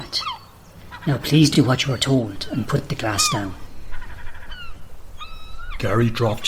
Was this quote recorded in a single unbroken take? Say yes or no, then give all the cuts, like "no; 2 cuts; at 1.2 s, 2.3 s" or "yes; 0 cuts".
yes; 0 cuts